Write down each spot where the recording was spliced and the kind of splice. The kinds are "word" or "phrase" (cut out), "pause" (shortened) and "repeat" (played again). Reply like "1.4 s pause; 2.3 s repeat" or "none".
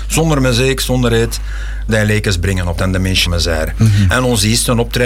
1.9 s word; 2.8 s word; 3.3 s word